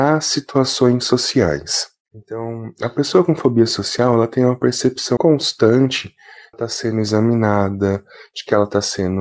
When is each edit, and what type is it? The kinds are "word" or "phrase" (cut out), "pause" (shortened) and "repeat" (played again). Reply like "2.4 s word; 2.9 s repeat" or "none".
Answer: 5.2 s word; 6.5 s phrase